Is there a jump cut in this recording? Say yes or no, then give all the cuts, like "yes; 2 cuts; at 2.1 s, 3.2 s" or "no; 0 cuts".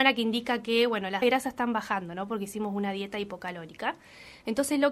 yes; 1 cut; at 1.2 s